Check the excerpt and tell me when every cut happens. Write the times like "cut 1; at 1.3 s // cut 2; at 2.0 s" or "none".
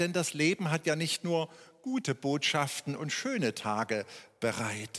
none